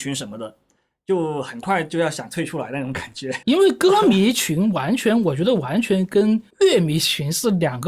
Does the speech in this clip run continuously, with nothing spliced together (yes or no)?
no